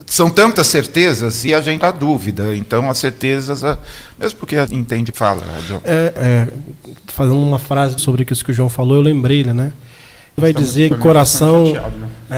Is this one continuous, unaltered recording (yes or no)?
no